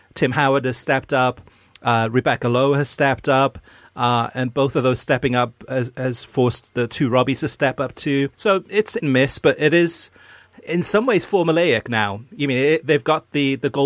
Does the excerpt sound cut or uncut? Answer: cut